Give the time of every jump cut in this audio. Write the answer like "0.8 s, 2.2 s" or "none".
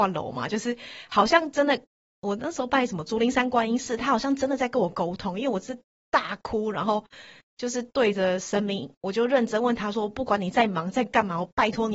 none